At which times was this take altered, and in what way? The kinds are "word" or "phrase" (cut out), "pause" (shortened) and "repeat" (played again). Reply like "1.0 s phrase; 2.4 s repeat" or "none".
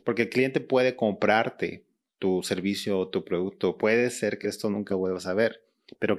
3.8 s word; 4.4 s word; 4.9 s word

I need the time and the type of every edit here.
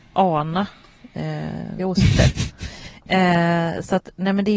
1.8 s phrase

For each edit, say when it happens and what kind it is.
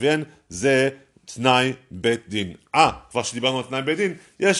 none

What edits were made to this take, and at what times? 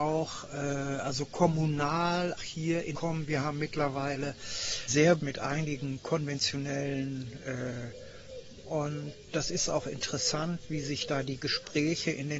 2.4 s word; 2.9 s phrase; 4.9 s word; 5.2 s phrase; 8.6 s word

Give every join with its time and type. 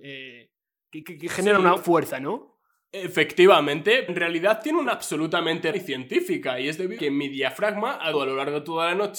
1.0 s word; 1.8 s word; 4.1 s word; 4.8 s word; 5.7 s word; 7.0 s word; 8.1 s word

